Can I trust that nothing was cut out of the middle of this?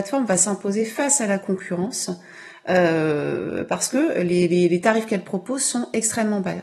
yes; 0 cuts

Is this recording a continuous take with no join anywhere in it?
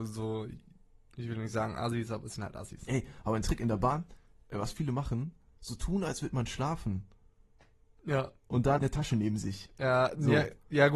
no; 1 cut; at 8.8 s

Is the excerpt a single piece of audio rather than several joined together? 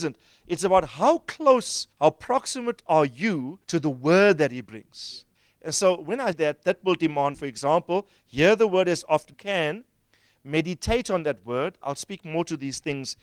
no; 6 cuts; at 1.9 s, 3.6 s, 5.3 s, 6.3 s, 7.3 s, 9.3 s

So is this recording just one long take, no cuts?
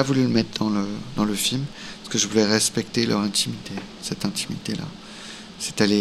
yes; 0 cuts

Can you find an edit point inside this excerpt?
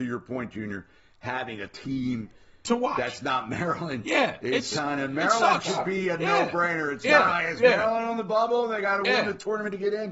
no; 0 cuts

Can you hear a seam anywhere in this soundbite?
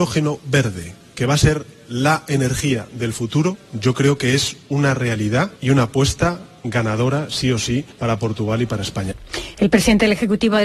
yes; 2 cuts; at 5.6 s, 7.9 s

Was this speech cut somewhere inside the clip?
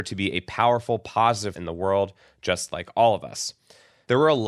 yes; 1 cut; at 1.5 s

